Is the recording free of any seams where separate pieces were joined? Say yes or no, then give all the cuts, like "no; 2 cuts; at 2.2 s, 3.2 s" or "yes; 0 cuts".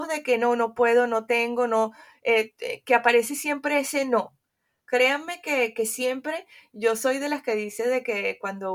yes; 0 cuts